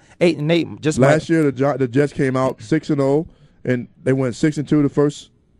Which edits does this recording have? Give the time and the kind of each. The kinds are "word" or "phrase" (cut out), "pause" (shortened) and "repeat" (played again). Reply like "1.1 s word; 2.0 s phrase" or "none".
none

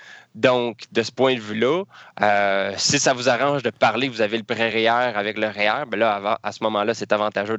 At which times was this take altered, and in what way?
none

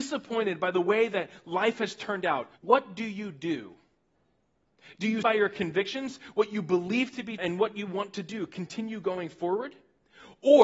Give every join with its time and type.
2.6 s pause; 5.2 s word; 7.4 s phrase

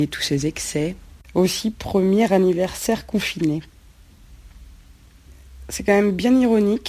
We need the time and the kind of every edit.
none

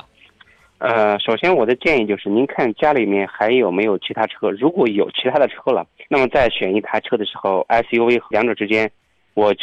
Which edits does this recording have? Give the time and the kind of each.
6.1 s pause; 8.3 s word

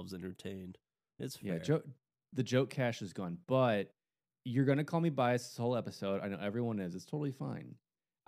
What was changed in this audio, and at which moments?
none

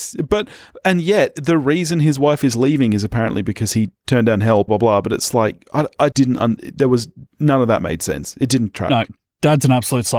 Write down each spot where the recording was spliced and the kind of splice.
4.7 s phrase; 6.1 s word; 7.3 s word; 9.3 s pause

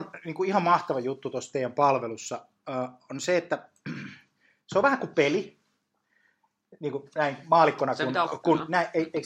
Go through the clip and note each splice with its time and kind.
8.3 s word

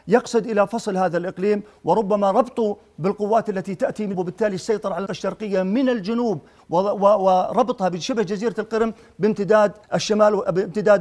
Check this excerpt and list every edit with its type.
4.1 s word; 5.1 s word; 9.8 s pause

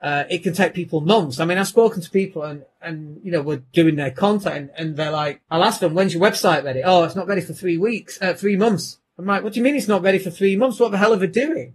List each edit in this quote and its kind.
5.4 s pause; 9.1 s pause

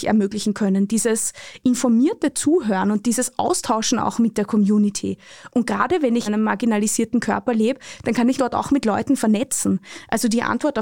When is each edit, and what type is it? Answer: 6.3 s word; 8.4 s word

